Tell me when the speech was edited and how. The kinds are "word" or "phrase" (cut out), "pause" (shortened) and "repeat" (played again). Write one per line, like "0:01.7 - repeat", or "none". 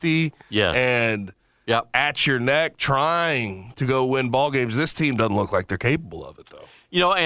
none